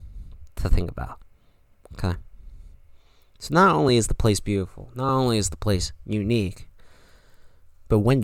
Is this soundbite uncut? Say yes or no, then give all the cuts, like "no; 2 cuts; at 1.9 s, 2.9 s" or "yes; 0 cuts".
yes; 0 cuts